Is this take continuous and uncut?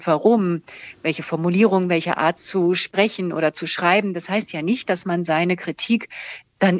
yes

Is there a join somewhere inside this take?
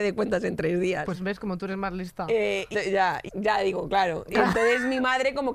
yes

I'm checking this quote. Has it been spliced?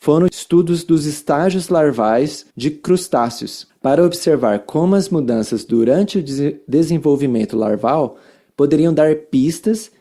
yes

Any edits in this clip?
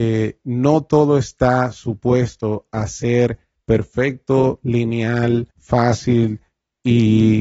yes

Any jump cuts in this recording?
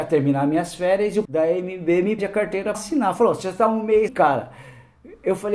yes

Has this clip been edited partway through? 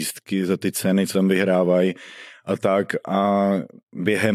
yes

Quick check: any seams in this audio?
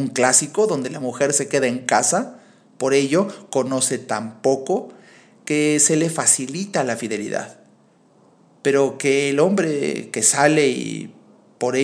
no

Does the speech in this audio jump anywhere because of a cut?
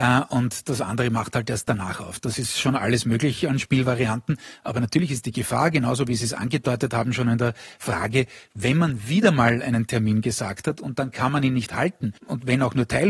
yes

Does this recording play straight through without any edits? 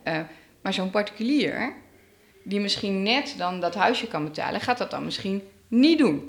yes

